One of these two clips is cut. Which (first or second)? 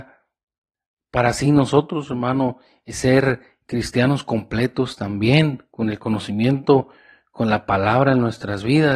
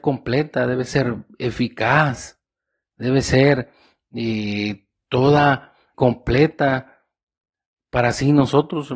second